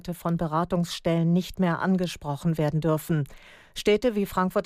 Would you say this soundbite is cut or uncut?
uncut